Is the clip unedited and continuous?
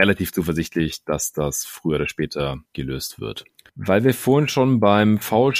yes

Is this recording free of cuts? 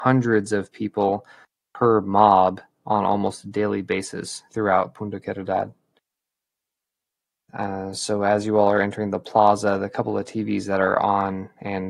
yes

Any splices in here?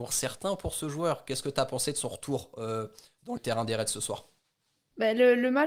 yes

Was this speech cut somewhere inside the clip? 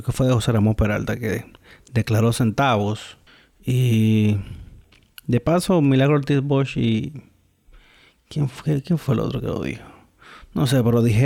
yes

